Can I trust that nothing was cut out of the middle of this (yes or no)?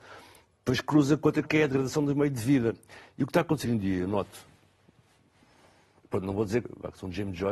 no